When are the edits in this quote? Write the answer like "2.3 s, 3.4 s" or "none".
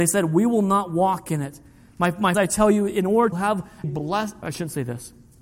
2.3 s, 3.3 s, 3.8 s, 4.4 s